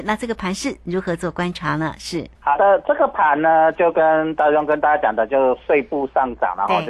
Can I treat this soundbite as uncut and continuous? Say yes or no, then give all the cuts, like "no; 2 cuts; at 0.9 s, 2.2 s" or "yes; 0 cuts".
no; 1 cut; at 2.3 s